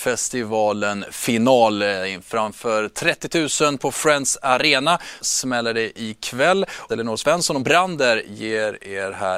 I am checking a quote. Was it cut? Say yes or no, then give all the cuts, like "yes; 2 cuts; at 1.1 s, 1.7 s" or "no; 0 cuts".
yes; 4 cuts; at 3.8 s, 5.2 s, 6.9 s, 7.6 s